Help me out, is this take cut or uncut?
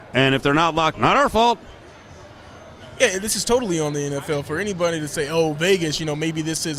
cut